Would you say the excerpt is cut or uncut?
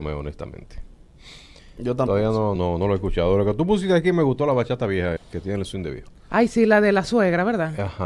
cut